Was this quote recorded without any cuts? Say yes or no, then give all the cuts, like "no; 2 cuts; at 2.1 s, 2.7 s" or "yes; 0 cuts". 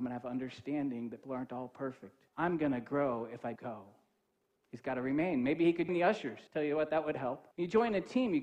no; 7 cuts; at 1.2 s, 2.3 s, 3.6 s, 4.4 s, 5.9 s, 6.5 s, 7.5 s